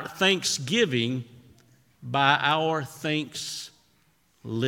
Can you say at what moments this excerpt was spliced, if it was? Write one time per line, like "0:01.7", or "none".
none